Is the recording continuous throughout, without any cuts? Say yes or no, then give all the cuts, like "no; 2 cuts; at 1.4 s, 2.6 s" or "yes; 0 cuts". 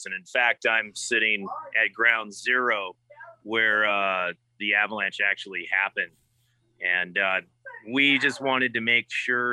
yes; 0 cuts